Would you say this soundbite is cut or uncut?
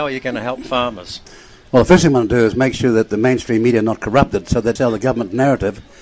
cut